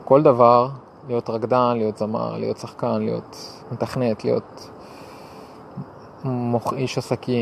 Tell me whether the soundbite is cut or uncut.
cut